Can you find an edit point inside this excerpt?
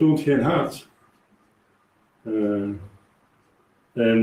no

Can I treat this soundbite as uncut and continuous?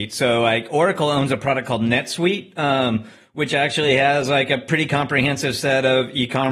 yes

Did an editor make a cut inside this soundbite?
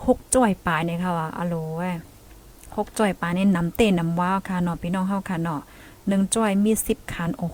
no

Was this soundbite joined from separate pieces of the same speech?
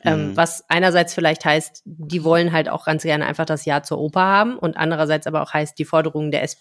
no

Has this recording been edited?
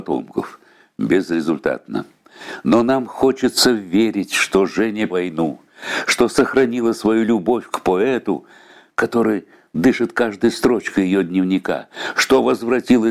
yes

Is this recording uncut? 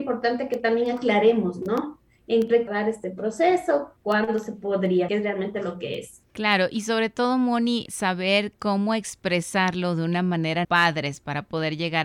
no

